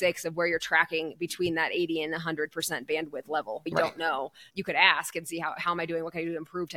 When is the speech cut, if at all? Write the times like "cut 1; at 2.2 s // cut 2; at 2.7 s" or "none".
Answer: cut 1; at 3.7 s